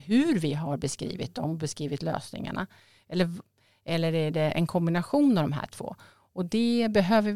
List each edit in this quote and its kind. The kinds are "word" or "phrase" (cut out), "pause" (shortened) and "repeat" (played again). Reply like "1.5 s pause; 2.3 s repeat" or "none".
none